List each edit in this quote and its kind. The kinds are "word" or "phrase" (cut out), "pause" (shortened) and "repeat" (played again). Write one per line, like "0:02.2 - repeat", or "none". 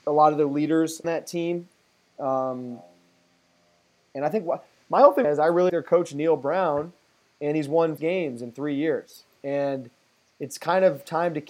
0:01.0 - word
0:05.2 - phrase
0:05.7 - word
0:08.0 - phrase